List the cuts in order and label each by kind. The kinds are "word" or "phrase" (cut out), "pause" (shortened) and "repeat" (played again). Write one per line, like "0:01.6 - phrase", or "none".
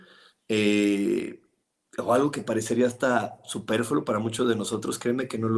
0:01.6 - pause